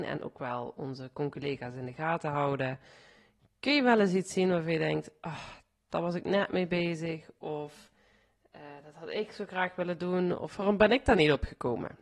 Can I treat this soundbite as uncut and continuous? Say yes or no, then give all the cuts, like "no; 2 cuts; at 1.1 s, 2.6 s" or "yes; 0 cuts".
yes; 0 cuts